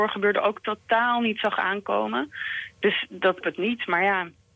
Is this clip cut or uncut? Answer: cut